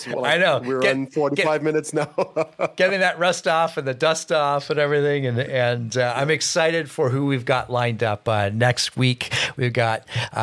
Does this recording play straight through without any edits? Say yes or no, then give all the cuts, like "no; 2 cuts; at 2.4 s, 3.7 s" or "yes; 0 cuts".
yes; 0 cuts